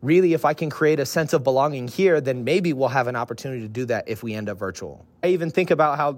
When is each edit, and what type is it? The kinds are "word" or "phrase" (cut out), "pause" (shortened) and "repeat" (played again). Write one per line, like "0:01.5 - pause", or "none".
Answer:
none